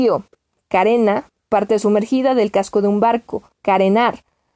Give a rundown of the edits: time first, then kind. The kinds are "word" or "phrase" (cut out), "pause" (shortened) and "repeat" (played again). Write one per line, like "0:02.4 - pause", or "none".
0:03.5 - pause